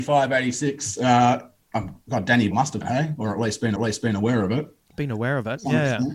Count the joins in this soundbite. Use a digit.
3